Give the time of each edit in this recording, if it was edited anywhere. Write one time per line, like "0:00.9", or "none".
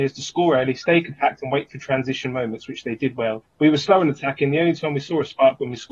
0:03.5

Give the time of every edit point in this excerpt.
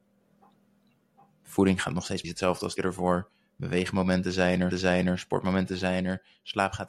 0:02.2
0:02.8
0:04.7

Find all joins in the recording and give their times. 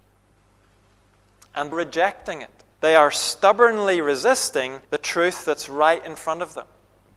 0:01.7
0:02.7
0:04.8

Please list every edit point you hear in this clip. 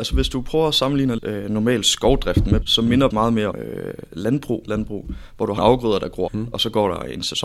0:01.2
0:02.6
0:03.1
0:03.5
0:04.7
0:05.6
0:06.3

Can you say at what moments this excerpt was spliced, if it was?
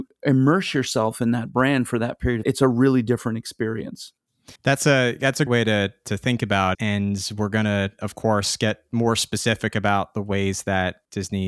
0:02.4
0:04.6
0:05.5
0:06.7

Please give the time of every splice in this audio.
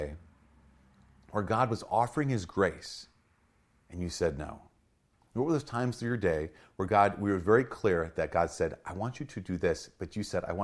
none

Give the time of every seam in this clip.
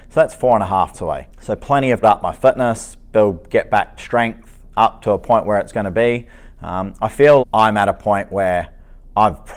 0:00.9
0:01.3
0:02.0
0:04.0
0:07.4

